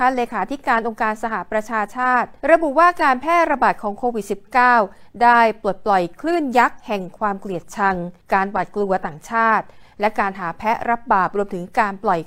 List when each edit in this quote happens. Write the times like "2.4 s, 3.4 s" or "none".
2.4 s, 8.2 s